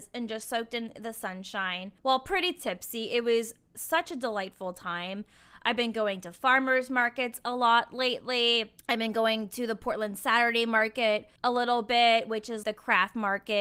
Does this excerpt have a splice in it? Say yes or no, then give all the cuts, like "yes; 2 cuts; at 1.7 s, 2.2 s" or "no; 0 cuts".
yes; 4 cuts; at 2.0 s, 8.8 s, 11.4 s, 12.6 s